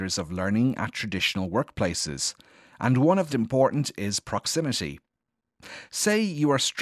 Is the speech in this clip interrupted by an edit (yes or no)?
yes